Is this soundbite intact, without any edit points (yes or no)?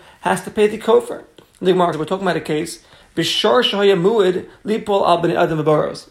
no